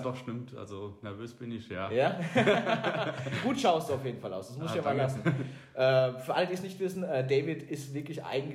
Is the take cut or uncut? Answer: uncut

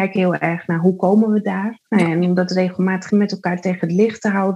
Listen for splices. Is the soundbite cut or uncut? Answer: cut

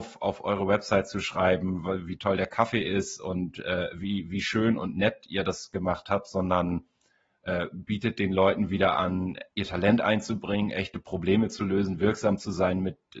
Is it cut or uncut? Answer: cut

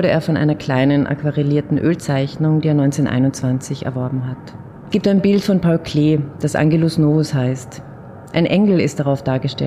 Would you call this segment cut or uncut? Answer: cut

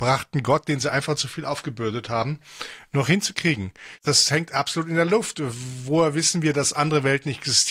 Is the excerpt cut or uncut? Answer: uncut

